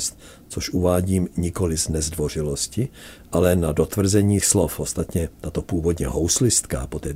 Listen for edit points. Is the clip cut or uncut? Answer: cut